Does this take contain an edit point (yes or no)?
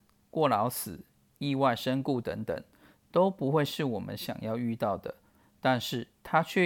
no